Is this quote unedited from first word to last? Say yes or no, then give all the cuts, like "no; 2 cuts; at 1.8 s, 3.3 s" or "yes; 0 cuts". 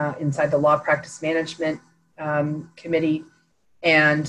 yes; 0 cuts